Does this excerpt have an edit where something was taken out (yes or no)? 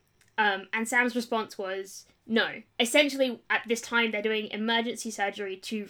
yes